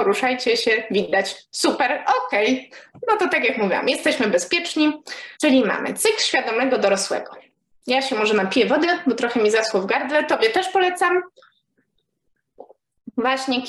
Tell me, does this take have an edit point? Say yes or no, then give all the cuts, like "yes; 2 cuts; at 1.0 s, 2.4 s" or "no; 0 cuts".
yes; 1 cut; at 5.4 s